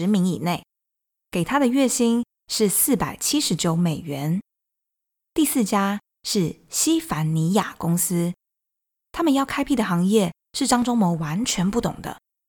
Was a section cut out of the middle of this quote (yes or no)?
no